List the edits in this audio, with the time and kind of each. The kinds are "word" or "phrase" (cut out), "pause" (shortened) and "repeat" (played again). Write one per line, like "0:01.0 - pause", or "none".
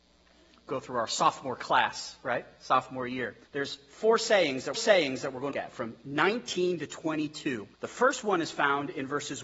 0:03.4 - pause
0:04.7 - repeat
0:05.5 - phrase
0:07.7 - pause